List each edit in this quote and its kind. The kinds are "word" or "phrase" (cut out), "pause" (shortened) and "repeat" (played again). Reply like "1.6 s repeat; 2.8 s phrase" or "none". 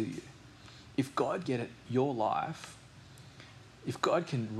1.4 s word; 1.8 s word